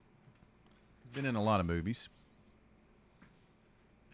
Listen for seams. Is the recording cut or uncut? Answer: uncut